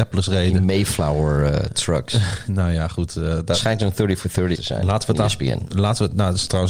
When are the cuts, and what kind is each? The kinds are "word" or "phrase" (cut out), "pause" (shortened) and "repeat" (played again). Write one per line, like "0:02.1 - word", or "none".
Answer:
0:04.5 - word

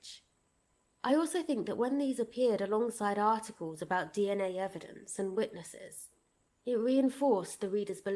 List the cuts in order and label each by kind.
none

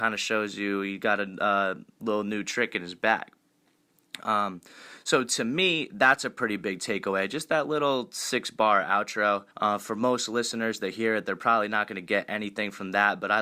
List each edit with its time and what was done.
0:09.5 - pause

